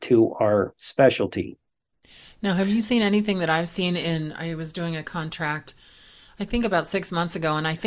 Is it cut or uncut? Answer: uncut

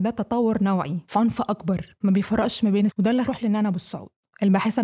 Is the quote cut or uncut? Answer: cut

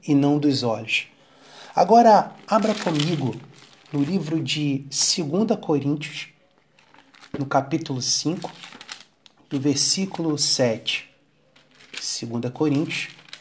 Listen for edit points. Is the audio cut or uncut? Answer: uncut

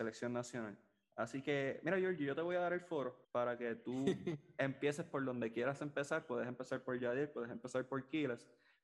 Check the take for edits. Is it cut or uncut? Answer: cut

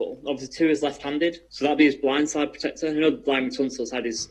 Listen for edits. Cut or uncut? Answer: cut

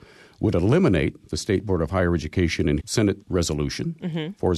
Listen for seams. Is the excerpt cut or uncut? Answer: cut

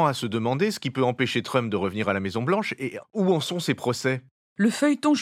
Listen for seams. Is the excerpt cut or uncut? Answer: cut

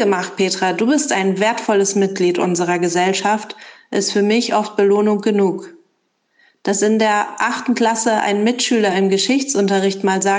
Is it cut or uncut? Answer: uncut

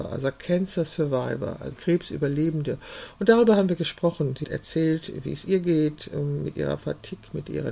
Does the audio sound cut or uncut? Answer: cut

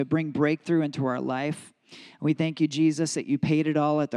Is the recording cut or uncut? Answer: uncut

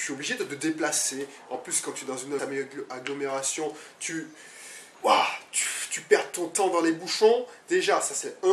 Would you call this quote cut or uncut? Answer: cut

